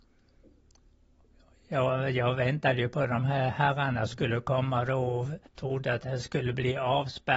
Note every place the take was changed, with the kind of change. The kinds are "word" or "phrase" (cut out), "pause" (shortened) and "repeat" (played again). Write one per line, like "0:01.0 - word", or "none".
0:05.5 - pause